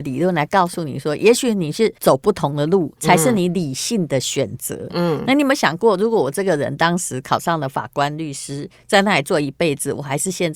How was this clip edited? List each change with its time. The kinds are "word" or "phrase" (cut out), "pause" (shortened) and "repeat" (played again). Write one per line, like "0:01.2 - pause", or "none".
0:02.0 - pause
0:03.0 - pause